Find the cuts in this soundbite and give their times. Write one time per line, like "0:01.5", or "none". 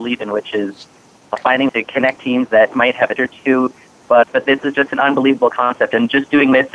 0:01.7
0:02.2
0:03.2
0:04.2